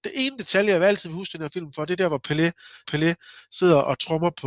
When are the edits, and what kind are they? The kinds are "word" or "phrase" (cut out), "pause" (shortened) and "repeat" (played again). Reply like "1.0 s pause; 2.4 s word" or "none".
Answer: 2.8 s repeat